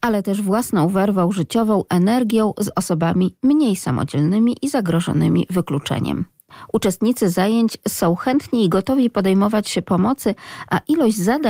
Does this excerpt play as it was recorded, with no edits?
no; 1 cut; at 1.9 s

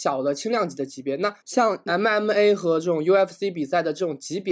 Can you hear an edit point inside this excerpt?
yes; 1 cut; at 1.4 s

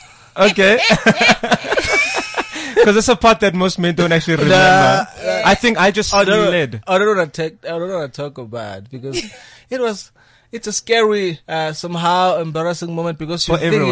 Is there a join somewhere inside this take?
yes; 1 cut; at 11.4 s

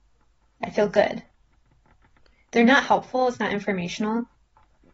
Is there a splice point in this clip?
no; 0 cuts

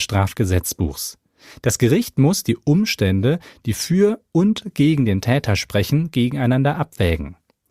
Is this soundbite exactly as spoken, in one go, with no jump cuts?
yes; 0 cuts

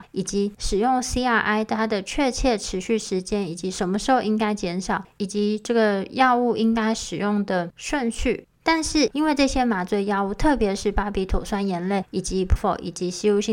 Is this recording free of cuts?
no; 1 cut; at 12.6 s

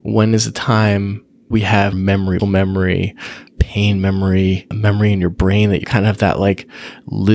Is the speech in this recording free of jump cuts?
no; 6 cuts; at 1.5 s, 1.9 s, 2.4 s, 3.5 s, 4.7 s, 5.8 s

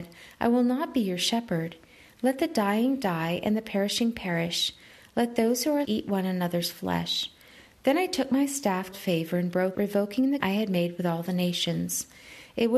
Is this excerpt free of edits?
no; 4 cuts; at 5.8 s, 8.9 s, 9.7 s, 10.4 s

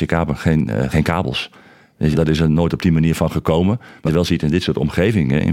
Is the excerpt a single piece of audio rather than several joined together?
no; 3 cuts; at 0.9 s, 2.1 s, 4.1 s

